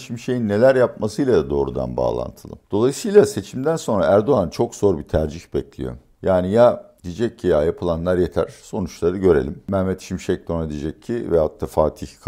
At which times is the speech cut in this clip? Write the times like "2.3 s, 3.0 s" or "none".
2.6 s